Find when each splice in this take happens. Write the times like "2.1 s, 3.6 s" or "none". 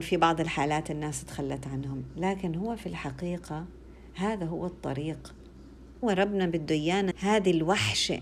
6.0 s, 7.1 s

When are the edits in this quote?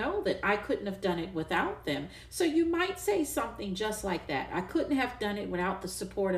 none

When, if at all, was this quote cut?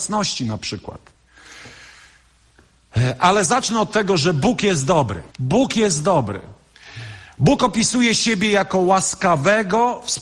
5.3 s

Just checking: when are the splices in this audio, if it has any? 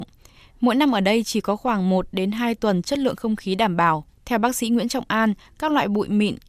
4.1 s

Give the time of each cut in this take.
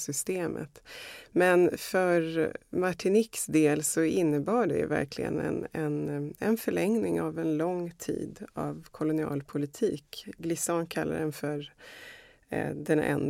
none

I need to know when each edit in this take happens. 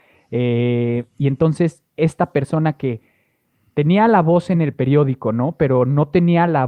none

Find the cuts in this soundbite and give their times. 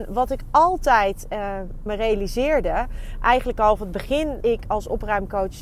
1.9 s, 3.8 s, 4.4 s

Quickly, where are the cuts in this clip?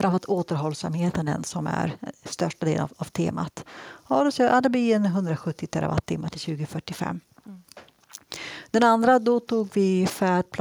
none

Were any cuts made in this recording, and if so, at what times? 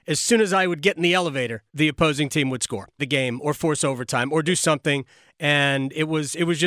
1.7 s, 3.0 s

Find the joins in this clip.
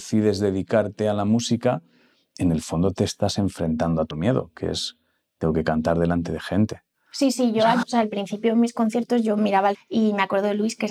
4.1 s, 7.8 s, 9.7 s

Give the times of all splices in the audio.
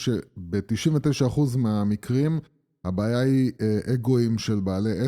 none

